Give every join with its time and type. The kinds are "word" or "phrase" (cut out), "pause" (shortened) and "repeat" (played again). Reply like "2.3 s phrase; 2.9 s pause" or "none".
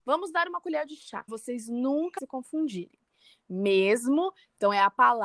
1.3 s word; 2.2 s word